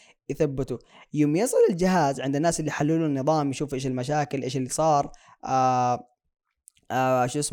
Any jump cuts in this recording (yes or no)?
no